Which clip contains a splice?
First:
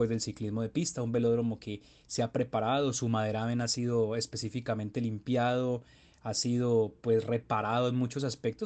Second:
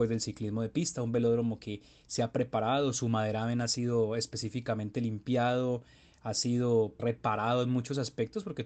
second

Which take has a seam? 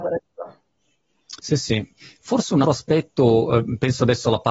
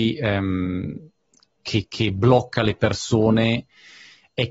first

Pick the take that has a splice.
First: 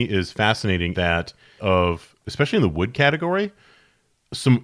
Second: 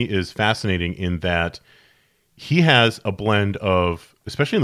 first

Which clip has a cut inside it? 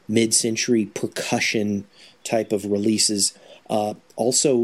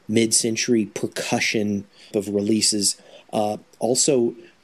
second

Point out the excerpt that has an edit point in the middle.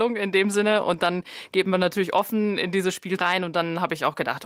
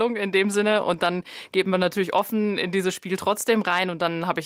first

